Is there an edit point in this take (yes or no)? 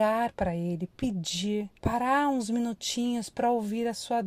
yes